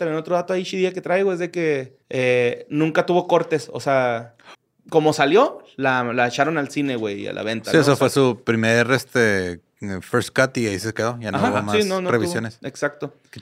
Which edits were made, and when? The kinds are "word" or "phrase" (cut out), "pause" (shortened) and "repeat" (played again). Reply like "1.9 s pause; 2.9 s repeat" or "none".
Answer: 2.0 s pause; 4.5 s pause